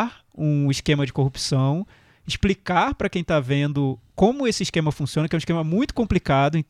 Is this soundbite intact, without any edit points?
yes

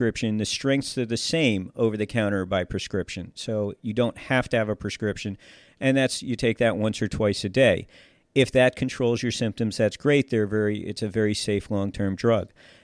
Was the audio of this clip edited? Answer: no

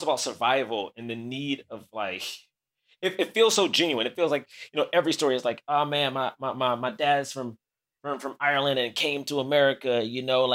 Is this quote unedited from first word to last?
yes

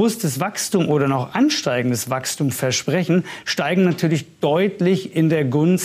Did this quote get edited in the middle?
no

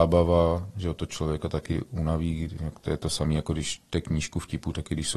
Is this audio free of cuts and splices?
yes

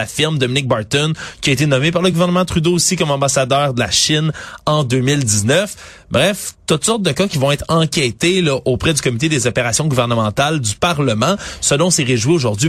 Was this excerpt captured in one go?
yes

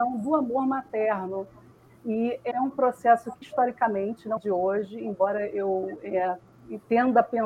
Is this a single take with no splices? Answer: no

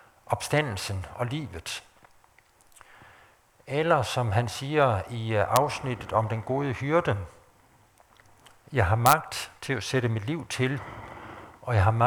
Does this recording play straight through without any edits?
yes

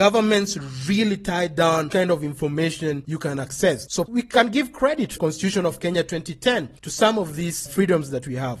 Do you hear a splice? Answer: yes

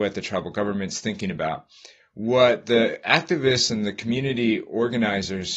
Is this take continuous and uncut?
yes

